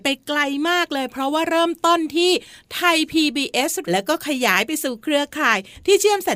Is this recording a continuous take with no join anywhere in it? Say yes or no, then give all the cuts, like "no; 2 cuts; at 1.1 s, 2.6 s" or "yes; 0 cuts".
no; 1 cut; at 3.8 s